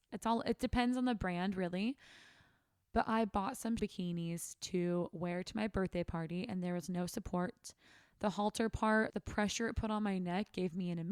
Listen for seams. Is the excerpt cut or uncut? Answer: cut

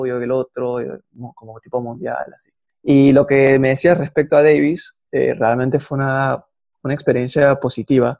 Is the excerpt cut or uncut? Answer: uncut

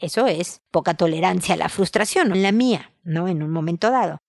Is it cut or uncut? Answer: cut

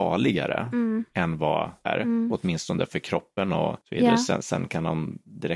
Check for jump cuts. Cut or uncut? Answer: cut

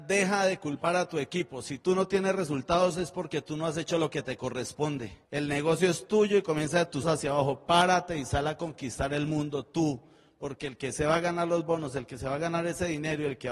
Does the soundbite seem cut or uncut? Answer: cut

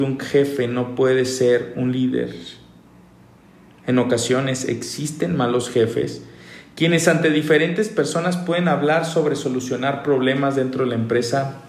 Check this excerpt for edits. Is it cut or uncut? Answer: uncut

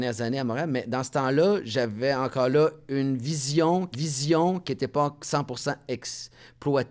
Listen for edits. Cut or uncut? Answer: cut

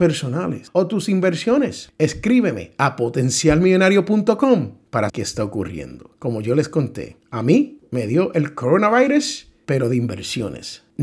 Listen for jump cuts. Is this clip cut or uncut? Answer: cut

